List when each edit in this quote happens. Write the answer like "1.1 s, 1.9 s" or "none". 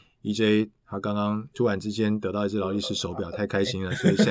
1.5 s